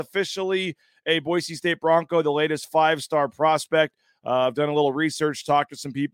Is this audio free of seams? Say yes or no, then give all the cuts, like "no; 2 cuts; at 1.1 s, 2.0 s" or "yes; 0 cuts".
yes; 0 cuts